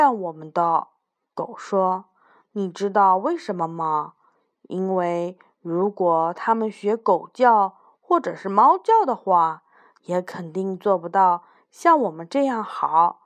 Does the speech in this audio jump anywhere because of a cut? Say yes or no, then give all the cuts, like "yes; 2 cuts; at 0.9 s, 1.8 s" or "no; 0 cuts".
no; 0 cuts